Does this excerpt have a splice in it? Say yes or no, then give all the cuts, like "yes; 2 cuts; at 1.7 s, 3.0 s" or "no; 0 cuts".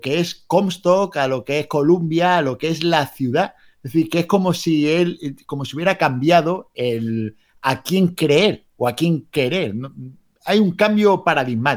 no; 0 cuts